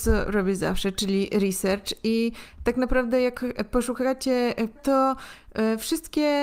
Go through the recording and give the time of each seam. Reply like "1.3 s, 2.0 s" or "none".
4.8 s